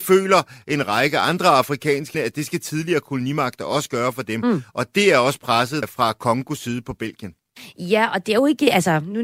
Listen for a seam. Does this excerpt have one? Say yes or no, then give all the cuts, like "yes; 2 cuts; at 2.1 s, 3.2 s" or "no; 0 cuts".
yes; 2 cuts; at 2.1 s, 5.8 s